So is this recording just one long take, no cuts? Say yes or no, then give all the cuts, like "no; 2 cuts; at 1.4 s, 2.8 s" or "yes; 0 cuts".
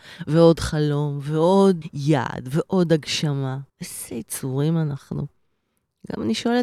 no; 2 cuts; at 1.8 s, 3.7 s